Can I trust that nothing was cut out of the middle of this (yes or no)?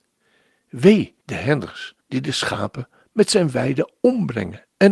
no